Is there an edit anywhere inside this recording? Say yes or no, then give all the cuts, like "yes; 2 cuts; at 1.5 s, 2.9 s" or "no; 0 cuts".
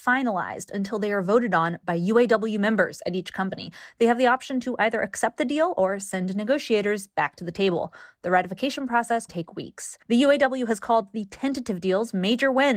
yes; 2 cuts; at 9.3 s, 10.0 s